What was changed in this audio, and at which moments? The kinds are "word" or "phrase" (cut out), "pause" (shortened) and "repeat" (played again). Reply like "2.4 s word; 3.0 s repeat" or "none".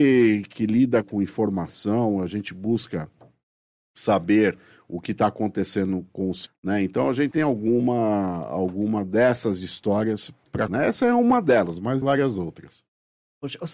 1.0 s word; 6.5 s word; 7.3 s word; 10.7 s word; 12.0 s word